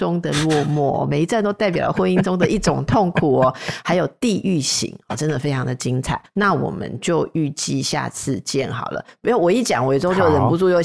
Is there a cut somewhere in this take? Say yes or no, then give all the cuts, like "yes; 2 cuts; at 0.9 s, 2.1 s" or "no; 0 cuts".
no; 0 cuts